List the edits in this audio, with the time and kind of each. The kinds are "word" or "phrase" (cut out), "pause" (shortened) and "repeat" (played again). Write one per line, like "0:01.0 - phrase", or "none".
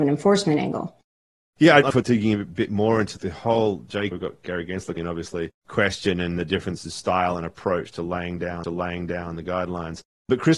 0:01.9 - word
0:04.1 - phrase
0:05.0 - word
0:05.6 - pause
0:08.6 - repeat